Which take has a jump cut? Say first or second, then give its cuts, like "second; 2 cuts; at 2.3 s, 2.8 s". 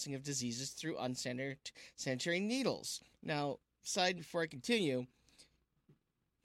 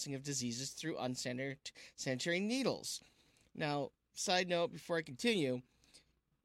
first; 2 cuts; at 3.1 s, 4.2 s